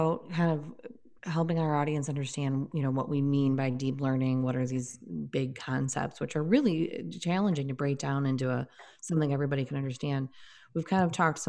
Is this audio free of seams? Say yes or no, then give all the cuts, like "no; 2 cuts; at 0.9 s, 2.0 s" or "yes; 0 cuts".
yes; 0 cuts